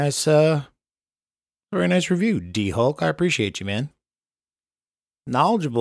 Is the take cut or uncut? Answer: uncut